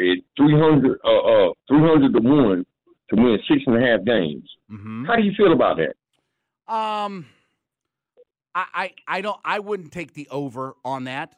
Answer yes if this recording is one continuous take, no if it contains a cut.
no